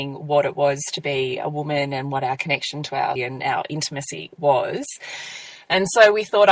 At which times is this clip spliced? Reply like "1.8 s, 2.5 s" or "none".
3.2 s